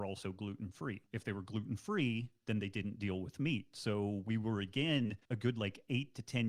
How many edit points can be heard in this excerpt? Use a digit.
2